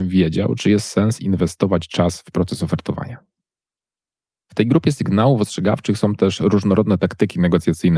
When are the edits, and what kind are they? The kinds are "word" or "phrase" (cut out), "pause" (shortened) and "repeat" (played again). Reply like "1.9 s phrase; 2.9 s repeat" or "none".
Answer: none